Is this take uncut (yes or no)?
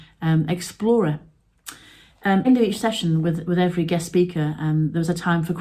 no